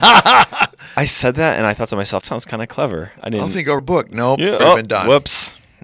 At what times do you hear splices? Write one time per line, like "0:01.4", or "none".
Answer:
0:02.2
0:03.8
0:04.6